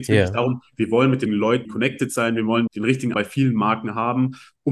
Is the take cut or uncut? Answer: cut